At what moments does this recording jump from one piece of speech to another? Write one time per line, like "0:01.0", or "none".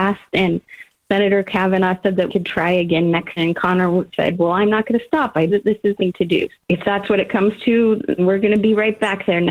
0:02.3
0:03.4
0:05.5
0:06.0
0:06.6
0:08.2